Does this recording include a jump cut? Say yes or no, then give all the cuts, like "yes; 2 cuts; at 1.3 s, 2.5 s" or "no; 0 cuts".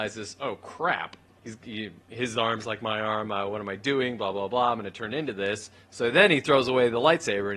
no; 0 cuts